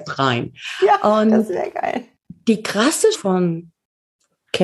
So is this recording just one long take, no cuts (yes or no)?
no